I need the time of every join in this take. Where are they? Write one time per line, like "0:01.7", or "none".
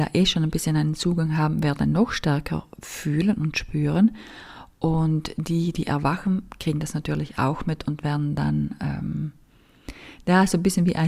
none